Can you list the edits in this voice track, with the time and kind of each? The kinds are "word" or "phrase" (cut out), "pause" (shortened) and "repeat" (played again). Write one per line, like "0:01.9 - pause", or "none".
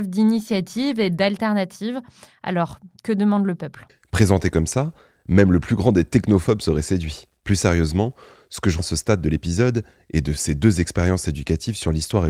0:07.4 - pause
0:08.8 - word